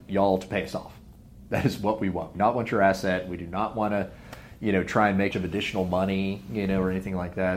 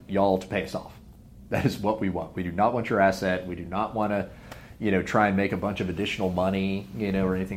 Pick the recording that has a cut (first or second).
first